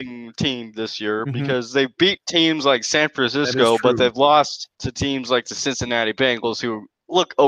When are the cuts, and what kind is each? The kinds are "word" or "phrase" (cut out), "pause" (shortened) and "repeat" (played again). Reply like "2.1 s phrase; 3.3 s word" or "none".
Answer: 4.7 s pause